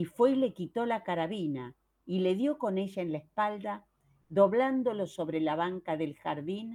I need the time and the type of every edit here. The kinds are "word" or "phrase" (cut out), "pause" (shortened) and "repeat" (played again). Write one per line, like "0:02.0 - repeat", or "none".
none